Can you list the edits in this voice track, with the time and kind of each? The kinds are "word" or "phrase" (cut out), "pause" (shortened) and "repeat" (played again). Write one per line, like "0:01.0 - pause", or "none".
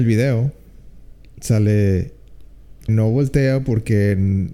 0:02.9 - word

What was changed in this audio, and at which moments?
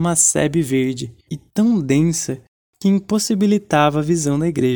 0:01.3 - word

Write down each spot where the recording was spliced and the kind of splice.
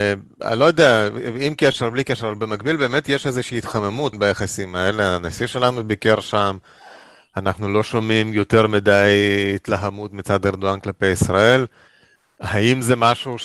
0:04.1 - phrase

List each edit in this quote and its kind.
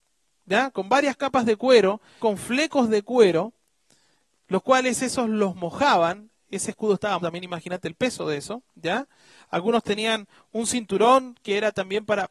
0:02.2 - word
0:07.2 - word

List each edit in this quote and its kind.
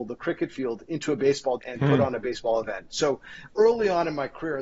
0:01.6 - word

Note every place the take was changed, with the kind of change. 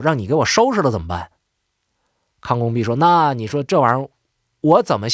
none

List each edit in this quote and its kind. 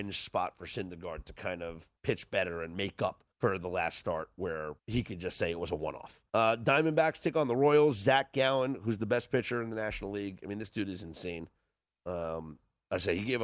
0:02.0 - pause
0:03.3 - pause
0:04.8 - pause
0:06.3 - pause

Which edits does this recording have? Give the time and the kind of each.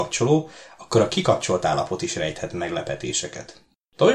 none

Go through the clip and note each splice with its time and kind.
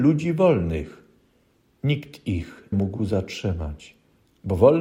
0:01.3 - pause
0:02.7 - word

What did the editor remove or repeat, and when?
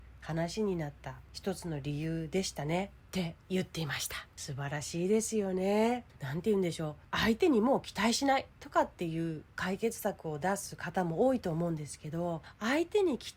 0:03.4 - pause

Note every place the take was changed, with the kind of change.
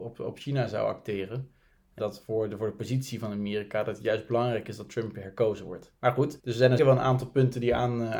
0:02.0 - word
0:06.0 - pause
0:06.4 - pause
0:06.8 - word

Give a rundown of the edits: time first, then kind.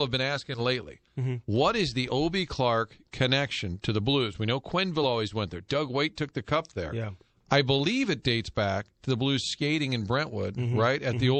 none

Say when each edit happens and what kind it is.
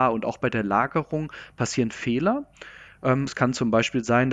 0:03.3 - word

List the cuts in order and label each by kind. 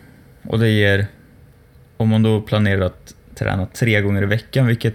none

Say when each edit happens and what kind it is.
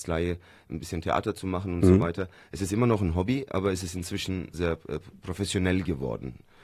0:04.5 - word

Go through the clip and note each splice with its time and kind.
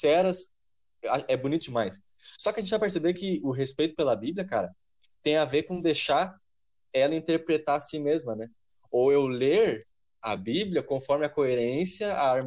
none

